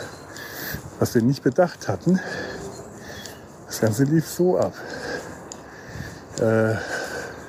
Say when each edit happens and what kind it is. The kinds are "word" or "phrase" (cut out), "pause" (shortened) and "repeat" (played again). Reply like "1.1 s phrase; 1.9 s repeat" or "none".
none